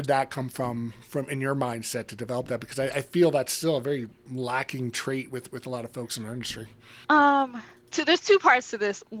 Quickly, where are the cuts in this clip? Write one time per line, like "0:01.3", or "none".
0:07.0